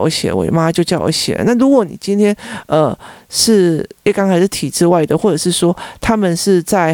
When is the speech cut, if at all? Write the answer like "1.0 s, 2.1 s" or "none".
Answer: 4.0 s